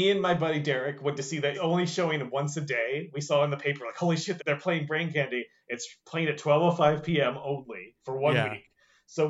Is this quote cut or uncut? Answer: cut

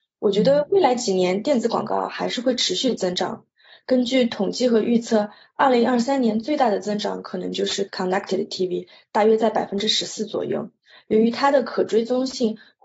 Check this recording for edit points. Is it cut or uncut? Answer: uncut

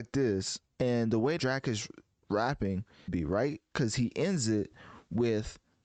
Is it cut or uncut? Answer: cut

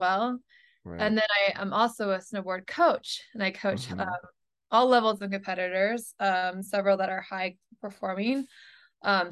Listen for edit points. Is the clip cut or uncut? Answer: uncut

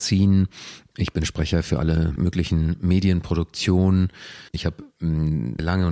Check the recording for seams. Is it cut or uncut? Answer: cut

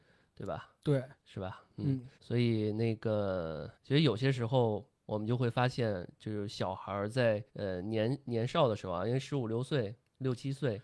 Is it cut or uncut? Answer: cut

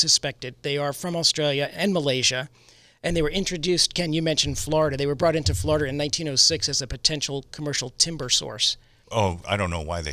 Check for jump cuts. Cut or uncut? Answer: uncut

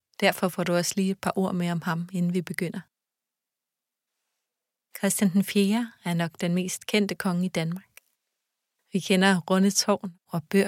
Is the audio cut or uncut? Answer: uncut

